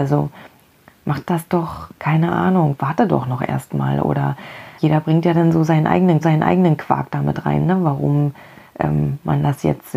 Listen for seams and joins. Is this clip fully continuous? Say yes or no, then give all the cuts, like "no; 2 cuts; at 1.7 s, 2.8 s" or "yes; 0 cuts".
no; 2 cuts; at 4.8 s, 6.2 s